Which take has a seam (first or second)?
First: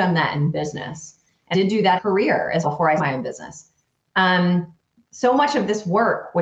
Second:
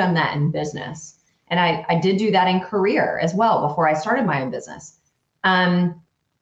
first